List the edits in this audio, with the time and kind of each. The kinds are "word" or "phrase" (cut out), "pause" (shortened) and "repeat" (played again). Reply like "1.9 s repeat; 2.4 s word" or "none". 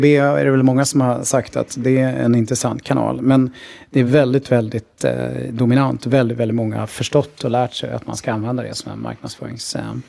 none